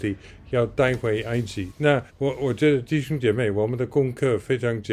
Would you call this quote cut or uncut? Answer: cut